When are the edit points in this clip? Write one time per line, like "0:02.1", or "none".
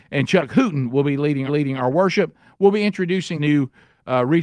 0:01.5
0:03.4